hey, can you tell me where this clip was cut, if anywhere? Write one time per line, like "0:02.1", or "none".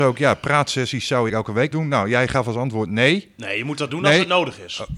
0:01.3
0:01.7